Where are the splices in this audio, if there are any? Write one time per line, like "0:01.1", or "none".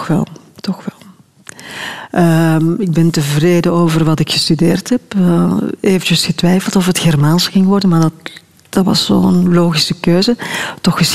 none